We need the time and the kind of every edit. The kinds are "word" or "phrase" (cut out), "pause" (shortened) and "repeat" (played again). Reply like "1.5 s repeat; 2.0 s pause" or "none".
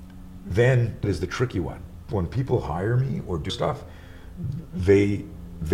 1.0 s word; 2.0 s word; 3.5 s word

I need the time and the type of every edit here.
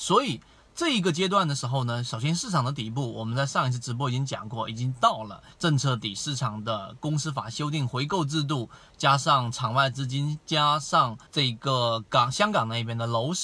5.5 s pause; 11.3 s pause

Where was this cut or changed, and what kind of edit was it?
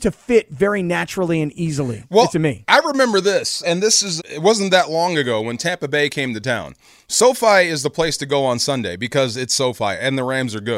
2.3 s word; 3.6 s word; 4.2 s word

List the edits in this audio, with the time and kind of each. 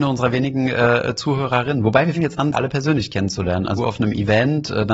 2.1 s word; 2.5 s word; 3.8 s word

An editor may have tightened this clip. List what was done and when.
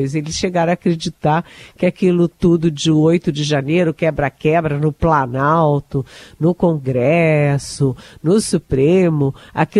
none

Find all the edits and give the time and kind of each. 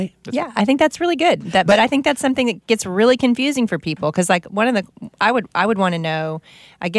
none

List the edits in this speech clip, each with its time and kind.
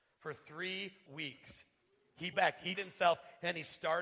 1.1 s word; 2.3 s word; 2.7 s word

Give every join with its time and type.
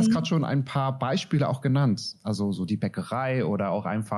none

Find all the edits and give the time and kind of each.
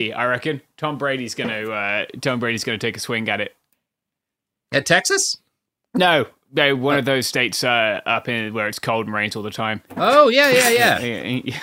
none

